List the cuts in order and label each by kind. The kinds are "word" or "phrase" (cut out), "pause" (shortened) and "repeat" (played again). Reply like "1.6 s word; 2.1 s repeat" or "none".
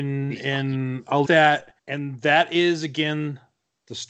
1.2 s phrase; 1.8 s pause